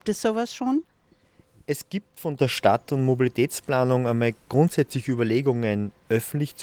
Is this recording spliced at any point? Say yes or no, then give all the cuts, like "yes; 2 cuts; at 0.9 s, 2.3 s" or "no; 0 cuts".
no; 0 cuts